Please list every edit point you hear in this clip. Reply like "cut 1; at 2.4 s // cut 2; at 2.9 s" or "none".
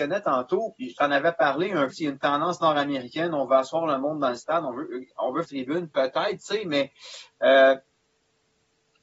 cut 1; at 1.9 s // cut 2; at 5.1 s // cut 3; at 5.4 s